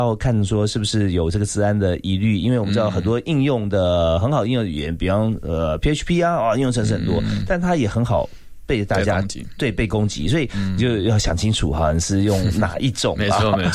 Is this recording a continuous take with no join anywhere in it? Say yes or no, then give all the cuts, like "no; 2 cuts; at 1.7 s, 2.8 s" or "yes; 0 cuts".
yes; 0 cuts